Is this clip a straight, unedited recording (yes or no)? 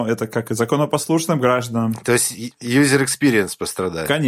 yes